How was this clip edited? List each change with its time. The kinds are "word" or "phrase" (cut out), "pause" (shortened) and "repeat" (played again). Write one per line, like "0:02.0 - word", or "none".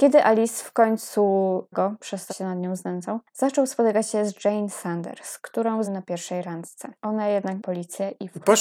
0:01.7 - word
0:02.3 - word
0:05.8 - word
0:07.0 - pause
0:07.6 - phrase